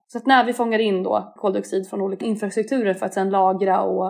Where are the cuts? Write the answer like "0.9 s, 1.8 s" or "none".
1.4 s, 2.2 s